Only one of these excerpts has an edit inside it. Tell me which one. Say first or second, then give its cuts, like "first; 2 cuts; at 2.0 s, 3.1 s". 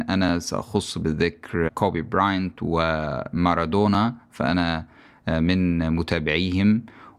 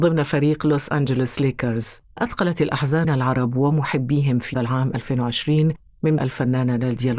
second; 4 cuts; at 2.2 s, 3.0 s, 4.5 s, 6.2 s